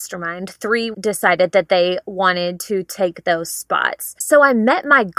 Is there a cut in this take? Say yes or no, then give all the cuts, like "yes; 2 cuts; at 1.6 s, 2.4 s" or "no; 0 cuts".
yes; 1 cut; at 0.9 s